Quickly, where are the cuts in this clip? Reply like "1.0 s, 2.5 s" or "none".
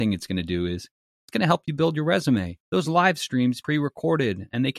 2.6 s, 3.6 s

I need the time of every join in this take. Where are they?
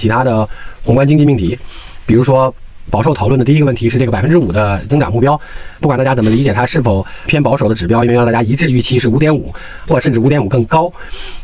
4.9 s

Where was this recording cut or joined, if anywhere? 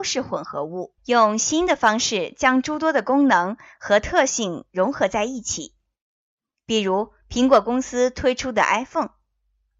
1.0 s

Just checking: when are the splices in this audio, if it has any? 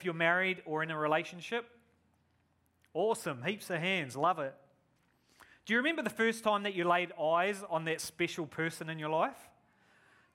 none

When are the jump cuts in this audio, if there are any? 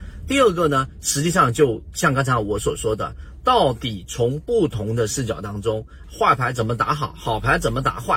6.0 s

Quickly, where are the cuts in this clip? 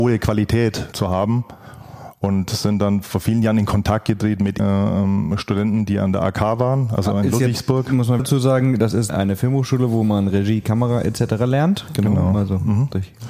0.9 s, 4.6 s, 8.2 s, 9.1 s

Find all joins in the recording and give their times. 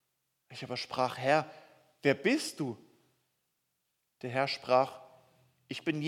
none

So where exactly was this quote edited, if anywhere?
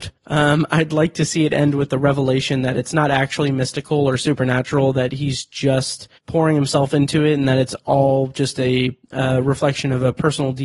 6.2 s, 9.0 s

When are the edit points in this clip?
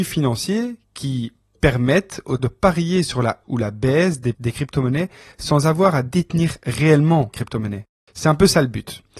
2.4 s, 3.4 s, 4.3 s, 7.3 s

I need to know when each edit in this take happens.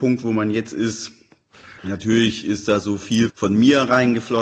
1.8 s, 3.3 s

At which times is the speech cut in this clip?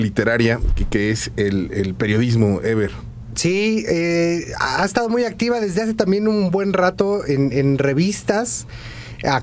none

